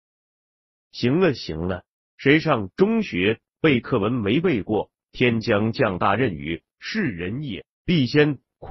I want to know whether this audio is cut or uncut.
cut